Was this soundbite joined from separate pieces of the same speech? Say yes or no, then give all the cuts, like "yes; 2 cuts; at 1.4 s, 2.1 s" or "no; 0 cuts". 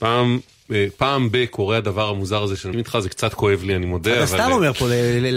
yes; 1 cut; at 2.7 s